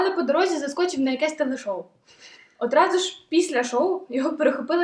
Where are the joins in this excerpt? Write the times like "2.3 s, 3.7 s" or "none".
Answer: none